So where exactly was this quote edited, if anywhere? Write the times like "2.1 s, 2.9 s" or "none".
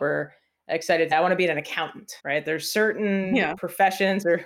1.1 s, 2.2 s

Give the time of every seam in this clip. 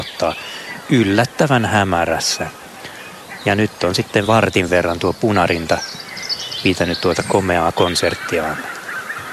none

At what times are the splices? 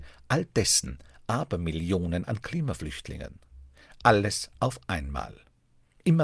none

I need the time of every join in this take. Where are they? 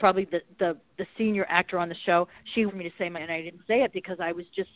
2.7 s, 3.1 s

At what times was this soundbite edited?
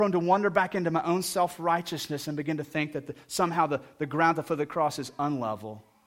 none

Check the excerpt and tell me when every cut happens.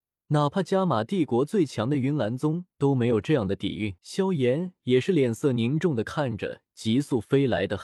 4.0 s

